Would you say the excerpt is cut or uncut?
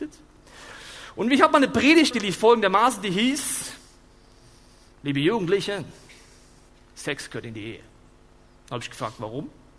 cut